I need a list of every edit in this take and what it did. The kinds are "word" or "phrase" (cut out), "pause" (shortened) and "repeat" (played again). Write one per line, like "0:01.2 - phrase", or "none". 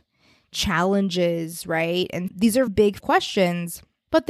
0:02.3 - word
0:02.7 - word
0:03.0 - word